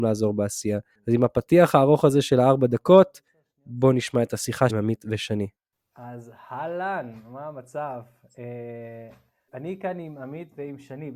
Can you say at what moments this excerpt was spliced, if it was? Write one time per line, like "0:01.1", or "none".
0:04.7
0:09.5

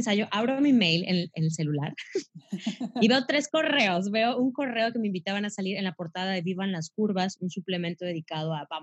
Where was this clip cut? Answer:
0:02.3

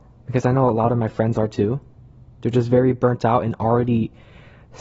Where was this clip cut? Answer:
none

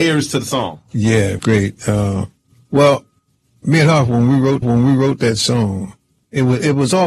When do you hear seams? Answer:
0:01.4
0:02.4
0:04.6

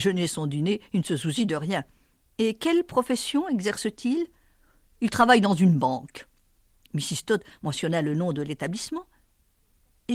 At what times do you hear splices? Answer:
none

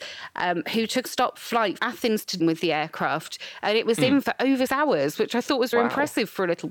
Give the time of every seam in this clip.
0:01.0
0:01.8
0:02.4
0:04.2
0:04.7
0:05.7

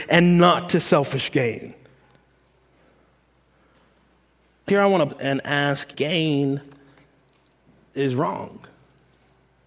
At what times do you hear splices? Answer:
0:04.7
0:05.1
0:05.9

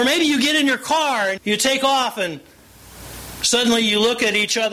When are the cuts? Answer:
0:01.4

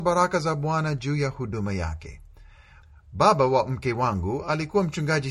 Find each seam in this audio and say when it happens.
none

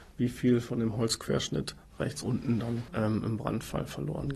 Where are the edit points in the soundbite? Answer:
0:02.2
0:02.9

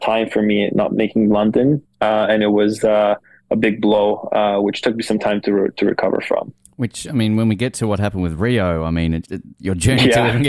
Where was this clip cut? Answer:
0:01.9
0:09.2

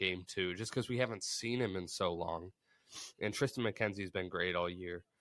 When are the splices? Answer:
none

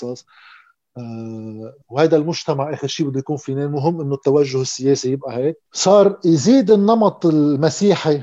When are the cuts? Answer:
0:01.8
0:05.7

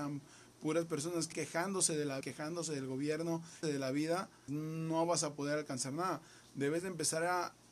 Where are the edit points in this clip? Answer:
0:01.3
0:02.2
0:03.6
0:04.5

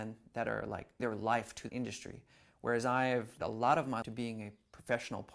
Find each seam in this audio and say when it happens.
0:01.0
0:01.7
0:03.4
0:04.0

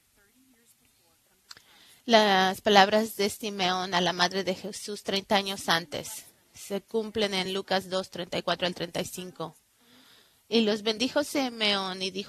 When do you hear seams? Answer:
none

